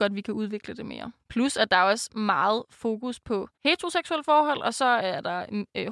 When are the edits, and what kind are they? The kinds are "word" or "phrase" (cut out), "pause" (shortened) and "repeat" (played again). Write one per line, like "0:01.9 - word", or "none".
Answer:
0:01.2 - pause
0:03.5 - pause